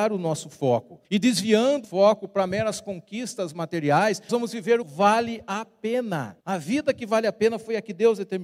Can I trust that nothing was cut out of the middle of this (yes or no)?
no